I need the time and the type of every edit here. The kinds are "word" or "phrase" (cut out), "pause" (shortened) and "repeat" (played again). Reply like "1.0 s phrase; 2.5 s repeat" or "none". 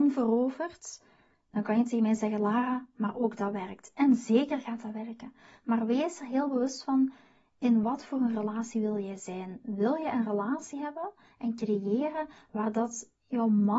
none